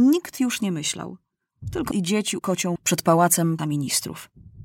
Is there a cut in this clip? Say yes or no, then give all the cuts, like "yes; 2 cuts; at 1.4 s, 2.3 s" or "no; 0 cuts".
yes; 4 cuts; at 1.9 s, 2.4 s, 2.8 s, 3.6 s